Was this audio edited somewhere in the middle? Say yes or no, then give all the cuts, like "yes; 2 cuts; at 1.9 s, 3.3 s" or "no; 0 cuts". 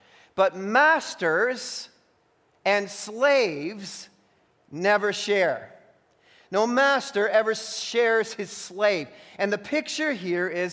no; 0 cuts